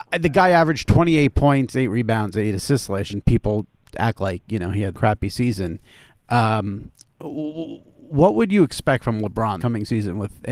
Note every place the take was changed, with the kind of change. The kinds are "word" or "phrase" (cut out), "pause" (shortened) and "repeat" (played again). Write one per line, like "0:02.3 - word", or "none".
0:03.1 - word
0:03.9 - word
0:04.9 - word
0:09.6 - word